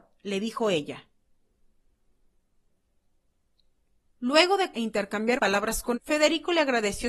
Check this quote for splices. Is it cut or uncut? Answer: cut